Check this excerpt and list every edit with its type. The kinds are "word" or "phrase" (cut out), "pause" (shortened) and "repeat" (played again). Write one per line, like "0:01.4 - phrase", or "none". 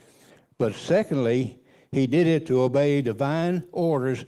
none